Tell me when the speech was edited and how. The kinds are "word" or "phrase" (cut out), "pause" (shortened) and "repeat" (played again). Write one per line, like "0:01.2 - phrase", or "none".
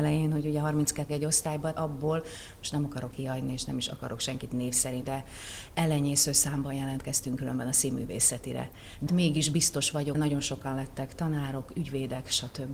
0:01.1 - word
0:01.8 - word
0:03.1 - word
0:05.0 - word
0:09.1 - word
0:10.1 - word